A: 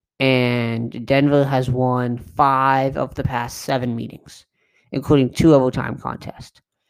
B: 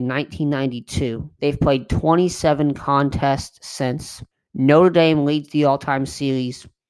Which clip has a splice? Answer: B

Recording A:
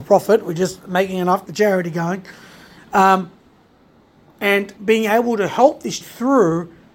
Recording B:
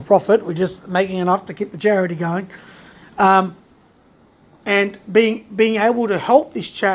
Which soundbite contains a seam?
A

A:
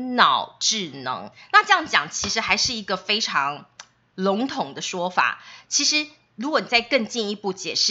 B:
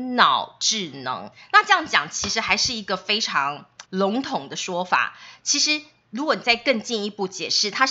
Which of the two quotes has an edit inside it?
B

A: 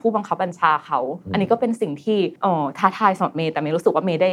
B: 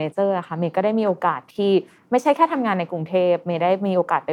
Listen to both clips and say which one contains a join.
A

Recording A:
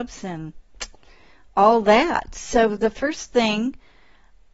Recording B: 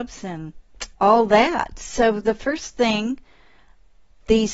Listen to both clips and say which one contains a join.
B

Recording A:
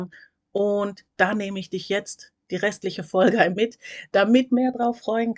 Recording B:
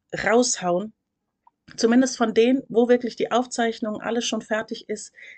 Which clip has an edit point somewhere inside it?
A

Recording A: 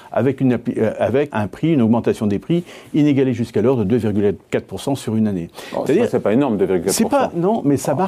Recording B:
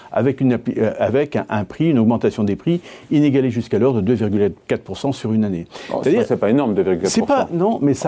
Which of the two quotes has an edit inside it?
A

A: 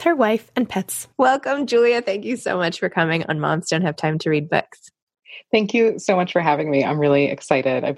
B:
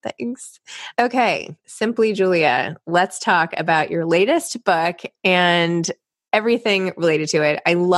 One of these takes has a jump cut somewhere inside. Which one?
A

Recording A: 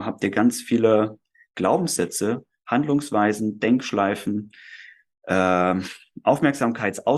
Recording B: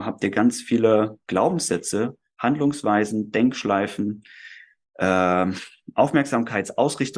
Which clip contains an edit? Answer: B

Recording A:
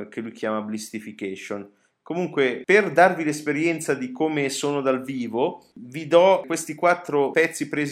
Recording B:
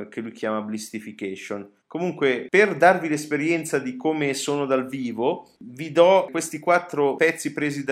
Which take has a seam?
B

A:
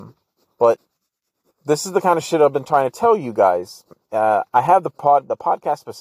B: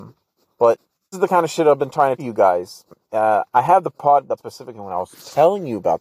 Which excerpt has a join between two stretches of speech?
B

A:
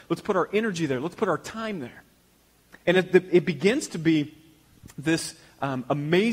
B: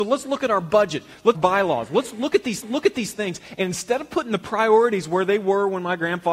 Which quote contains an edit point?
B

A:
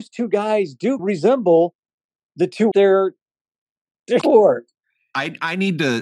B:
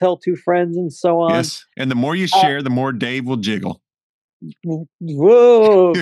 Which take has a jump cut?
A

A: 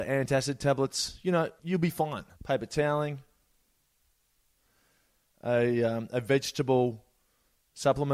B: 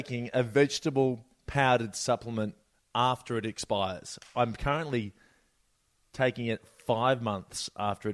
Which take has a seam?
A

